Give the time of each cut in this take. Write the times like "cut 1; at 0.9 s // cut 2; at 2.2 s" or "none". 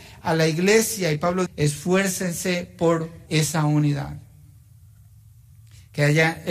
cut 1; at 1.5 s // cut 2; at 3.3 s